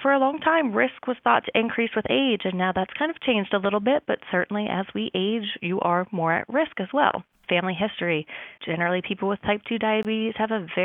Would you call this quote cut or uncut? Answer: cut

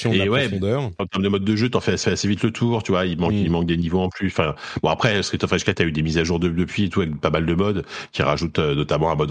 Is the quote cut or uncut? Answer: cut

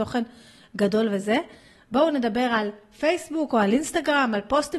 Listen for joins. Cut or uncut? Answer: uncut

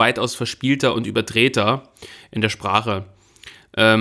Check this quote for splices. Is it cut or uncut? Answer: uncut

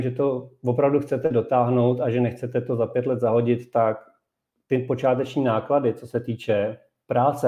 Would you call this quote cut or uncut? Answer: uncut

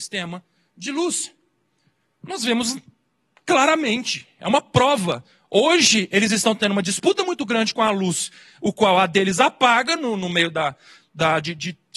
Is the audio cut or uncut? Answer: uncut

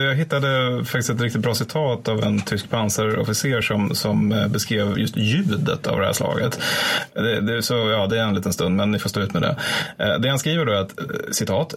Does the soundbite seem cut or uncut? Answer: uncut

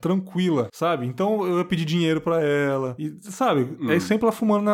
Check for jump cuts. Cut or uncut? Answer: uncut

